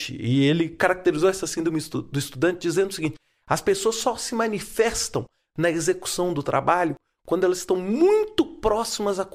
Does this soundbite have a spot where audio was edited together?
no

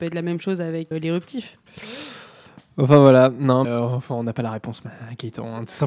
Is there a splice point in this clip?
yes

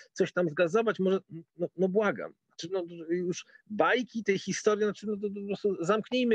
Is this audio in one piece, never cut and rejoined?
yes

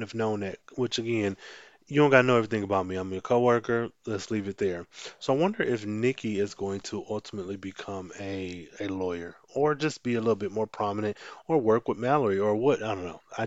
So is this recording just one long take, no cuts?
yes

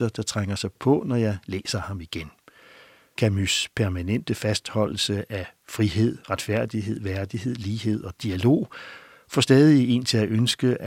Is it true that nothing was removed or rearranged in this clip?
yes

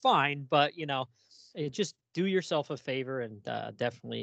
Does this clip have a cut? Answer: no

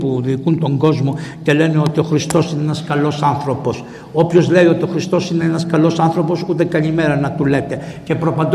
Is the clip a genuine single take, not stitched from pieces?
yes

